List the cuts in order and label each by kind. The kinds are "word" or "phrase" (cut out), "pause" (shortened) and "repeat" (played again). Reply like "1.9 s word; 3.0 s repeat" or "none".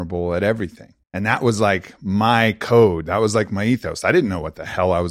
1.0 s pause